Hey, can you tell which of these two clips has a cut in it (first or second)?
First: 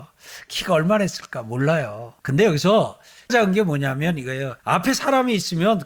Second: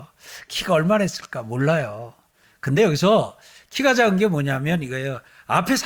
first